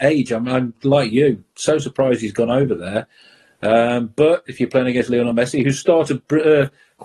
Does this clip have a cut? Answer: no; 0 cuts

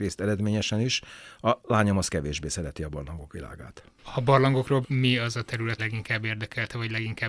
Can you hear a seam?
yes; 2 cuts; at 4.8 s, 5.8 s

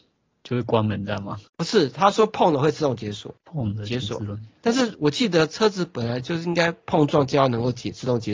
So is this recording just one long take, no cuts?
no; 2 cuts; at 1.5 s, 3.4 s

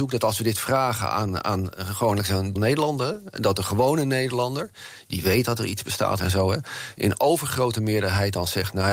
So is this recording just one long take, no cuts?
no; 2 cuts; at 2.6 s, 6.2 s

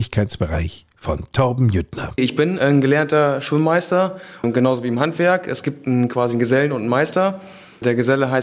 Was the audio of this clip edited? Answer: no; 0 cuts

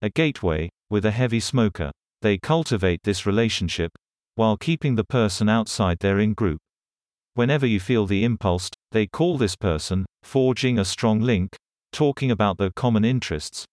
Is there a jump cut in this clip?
yes; 3 cuts; at 2.1 s, 8.7 s, 10.1 s

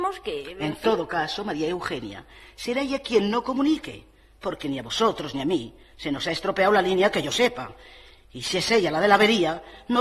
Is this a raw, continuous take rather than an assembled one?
yes; 0 cuts

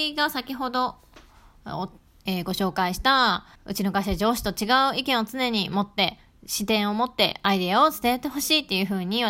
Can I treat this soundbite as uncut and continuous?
no; 1 cut; at 3.5 s

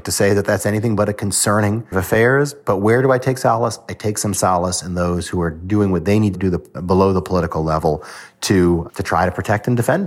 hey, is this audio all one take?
no; 4 cuts; at 1.9 s, 6.3 s, 6.7 s, 8.9 s

